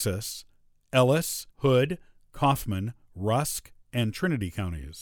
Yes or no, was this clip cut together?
yes